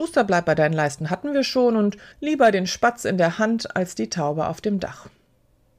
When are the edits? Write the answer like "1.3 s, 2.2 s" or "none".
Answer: 2.1 s